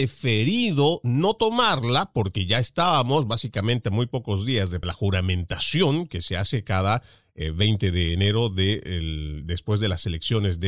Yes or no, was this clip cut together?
no